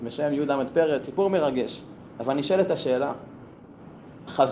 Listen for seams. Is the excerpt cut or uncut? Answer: cut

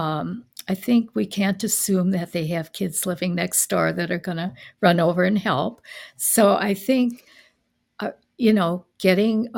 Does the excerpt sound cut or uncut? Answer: uncut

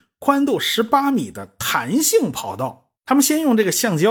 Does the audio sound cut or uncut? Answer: cut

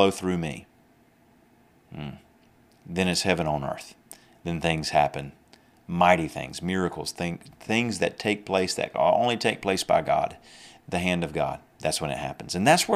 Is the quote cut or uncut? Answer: uncut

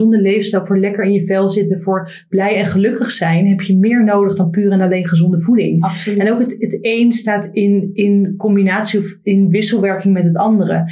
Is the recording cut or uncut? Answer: uncut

